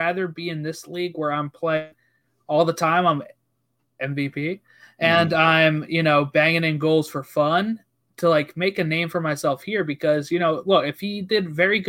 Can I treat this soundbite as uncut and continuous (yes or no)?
yes